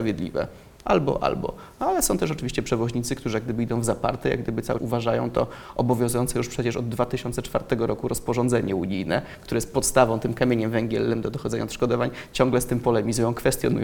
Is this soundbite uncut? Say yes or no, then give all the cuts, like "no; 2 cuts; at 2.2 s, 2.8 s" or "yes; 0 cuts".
no; 1 cut; at 4.8 s